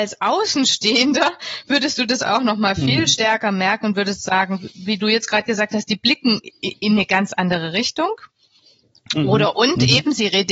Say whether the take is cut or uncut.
uncut